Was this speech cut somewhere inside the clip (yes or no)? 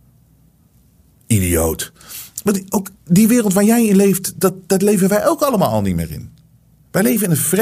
yes